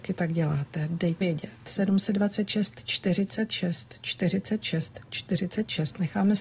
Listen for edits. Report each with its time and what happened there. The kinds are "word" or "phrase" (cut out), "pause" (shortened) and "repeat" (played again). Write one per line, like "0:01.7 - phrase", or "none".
0:01.2 - word